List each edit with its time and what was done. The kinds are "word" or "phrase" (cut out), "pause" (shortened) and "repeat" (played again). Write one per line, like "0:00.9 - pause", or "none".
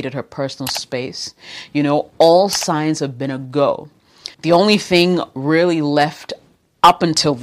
0:04.3 - pause